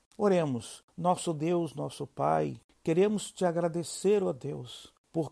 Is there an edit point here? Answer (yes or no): no